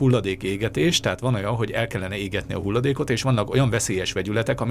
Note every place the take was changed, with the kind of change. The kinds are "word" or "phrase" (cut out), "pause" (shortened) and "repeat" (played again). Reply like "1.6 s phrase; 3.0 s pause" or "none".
none